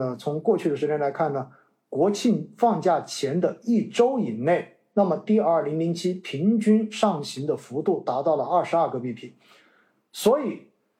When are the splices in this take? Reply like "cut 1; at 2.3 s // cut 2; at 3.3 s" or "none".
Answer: none